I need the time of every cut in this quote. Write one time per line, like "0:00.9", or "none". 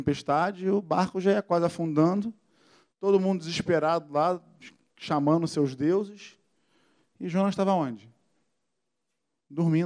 none